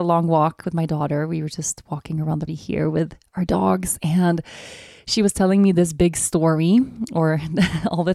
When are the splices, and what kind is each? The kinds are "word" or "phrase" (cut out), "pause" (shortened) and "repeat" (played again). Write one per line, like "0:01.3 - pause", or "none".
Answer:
0:02.5 - word